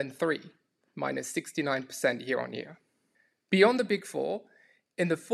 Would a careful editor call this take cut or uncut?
cut